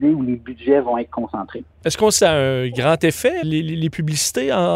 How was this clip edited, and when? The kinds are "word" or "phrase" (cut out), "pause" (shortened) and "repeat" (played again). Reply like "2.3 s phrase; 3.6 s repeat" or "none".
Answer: 1.7 s pause; 2.2 s word; 3.4 s word